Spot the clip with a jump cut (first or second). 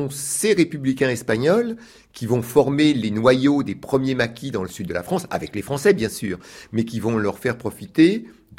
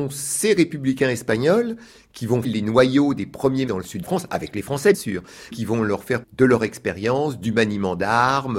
second